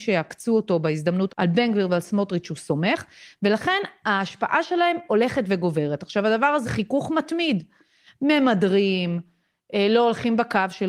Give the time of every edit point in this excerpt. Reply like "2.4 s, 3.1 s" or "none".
1.3 s, 6.6 s